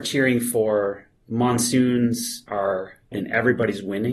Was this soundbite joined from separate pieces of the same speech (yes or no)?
yes